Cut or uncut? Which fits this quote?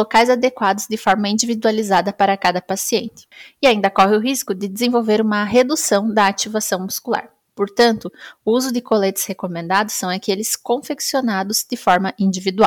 uncut